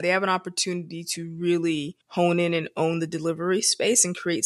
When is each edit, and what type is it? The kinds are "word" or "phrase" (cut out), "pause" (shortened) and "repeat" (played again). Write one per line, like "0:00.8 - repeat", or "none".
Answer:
0:02.0 - pause